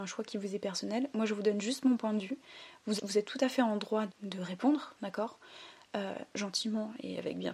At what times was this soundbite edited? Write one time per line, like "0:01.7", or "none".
0:03.0
0:04.1